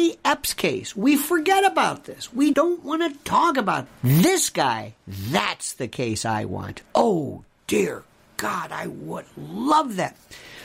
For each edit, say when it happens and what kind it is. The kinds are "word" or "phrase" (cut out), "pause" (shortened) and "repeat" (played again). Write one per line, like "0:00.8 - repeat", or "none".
0:02.5 - word
0:03.9 - word